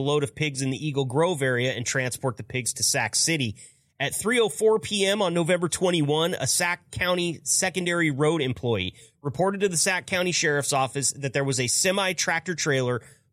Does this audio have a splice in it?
no; 0 cuts

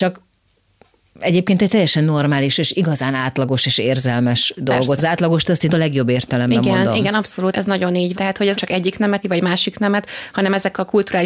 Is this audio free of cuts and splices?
no; 6 cuts; at 5.0 s, 5.7 s, 7.5 s, 8.1 s, 8.5 s, 9.2 s

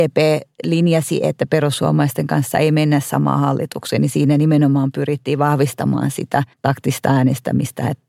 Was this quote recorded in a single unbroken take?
no; 1 cut; at 6.5 s

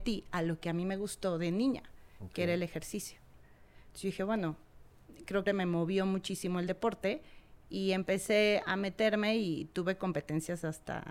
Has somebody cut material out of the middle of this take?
yes; 1 cut; at 5.5 s

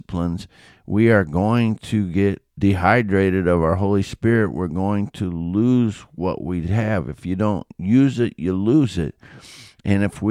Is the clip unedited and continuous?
no; 1 cut; at 2.5 s

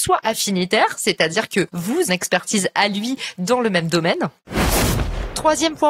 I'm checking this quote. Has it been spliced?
yes; 1 cut; at 2.1 s

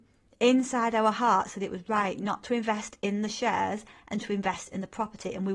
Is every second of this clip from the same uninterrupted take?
yes; 0 cuts

